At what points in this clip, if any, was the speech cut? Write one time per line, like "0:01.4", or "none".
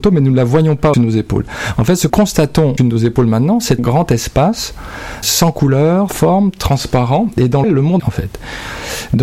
0:00.9
0:02.1
0:02.8
0:03.8
0:05.2
0:06.1
0:07.6
0:08.0